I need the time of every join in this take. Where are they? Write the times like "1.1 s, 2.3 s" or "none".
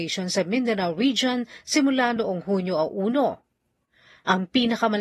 none